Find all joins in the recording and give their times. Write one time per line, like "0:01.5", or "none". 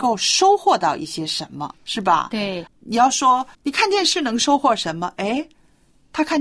0:01.8
0:02.7
0:03.5